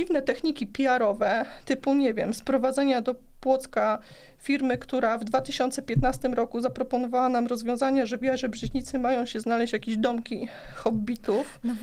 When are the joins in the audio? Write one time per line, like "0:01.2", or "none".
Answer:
none